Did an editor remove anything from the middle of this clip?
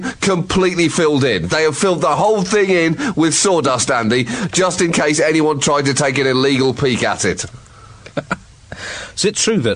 yes; 1 cut; at 8.1 s

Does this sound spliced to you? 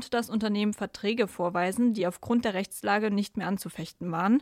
no; 0 cuts

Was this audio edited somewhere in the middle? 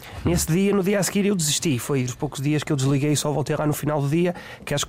yes; 1 cut; at 2.1 s

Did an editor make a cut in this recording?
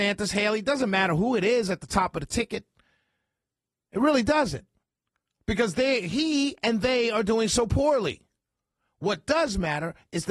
no; 0 cuts

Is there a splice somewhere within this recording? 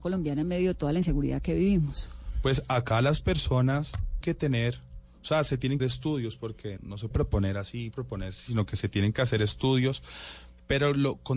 yes; 5 cuts; at 4.2 s, 5.8 s, 6.8 s, 7.1 s, 7.9 s

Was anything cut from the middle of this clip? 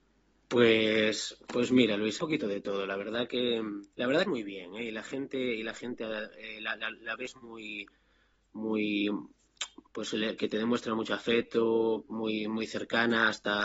yes; 4 cuts; at 2.2 s, 3.9 s, 4.3 s, 9.9 s

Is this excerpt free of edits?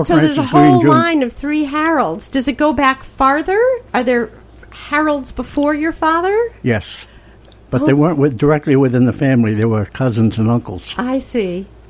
no; 1 cut; at 3.9 s

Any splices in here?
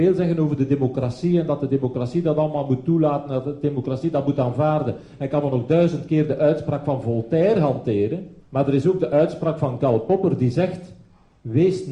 yes; 1 cut; at 8.4 s

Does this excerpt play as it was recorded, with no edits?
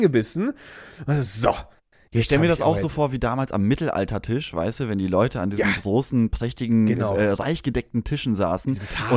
yes; 0 cuts

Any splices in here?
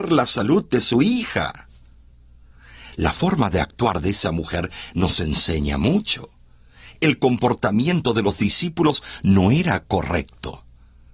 no; 0 cuts

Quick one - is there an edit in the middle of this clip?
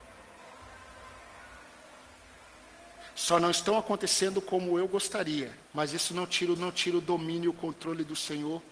yes; 2 cuts; at 5.6 s, 6.6 s

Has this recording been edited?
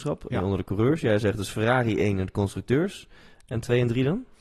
no; 0 cuts

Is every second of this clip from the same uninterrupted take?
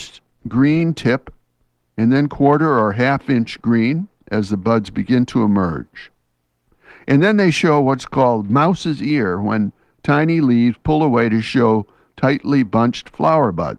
yes; 0 cuts

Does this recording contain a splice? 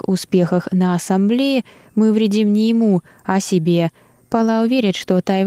no; 0 cuts

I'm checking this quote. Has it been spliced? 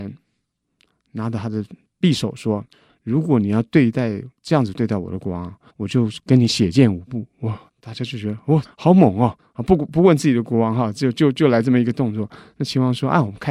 yes; 6 cuts; at 2.7 s, 4.3 s, 5.7 s, 7.7 s, 8.6 s, 9.4 s

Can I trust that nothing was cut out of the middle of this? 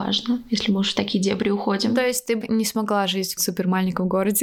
no; 1 cut; at 3.4 s

